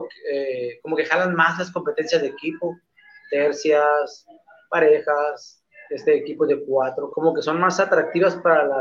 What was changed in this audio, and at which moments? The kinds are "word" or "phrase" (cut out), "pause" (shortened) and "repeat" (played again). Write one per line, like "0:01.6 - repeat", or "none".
0:07.1 - phrase

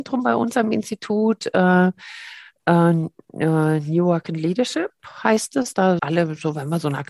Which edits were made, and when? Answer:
0:06.0 - word

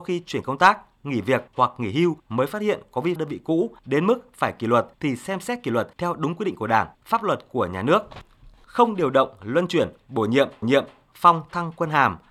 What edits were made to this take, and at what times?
0:01.5 - pause
0:02.2 - pause
0:03.2 - phrase
0:03.8 - pause
0:04.9 - pause
0:05.9 - pause
0:06.9 - pause
0:10.6 - repeat

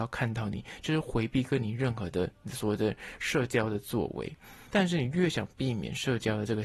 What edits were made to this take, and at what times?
0:04.7 - pause

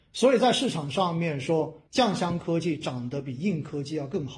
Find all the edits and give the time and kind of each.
0:01.9 - pause

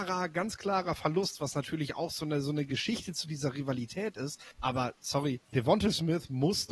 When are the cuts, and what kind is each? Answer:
0:04.5 - pause
0:05.4 - pause

